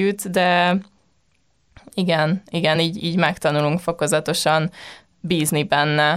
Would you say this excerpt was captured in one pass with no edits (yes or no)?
yes